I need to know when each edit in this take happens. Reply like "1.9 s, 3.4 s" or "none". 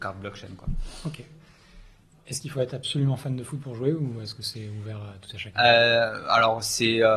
none